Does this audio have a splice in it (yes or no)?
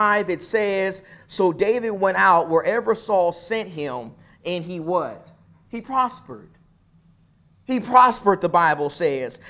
no